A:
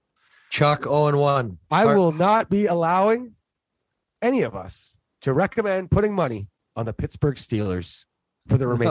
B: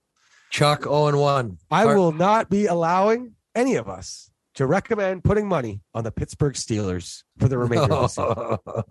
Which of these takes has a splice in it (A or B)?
B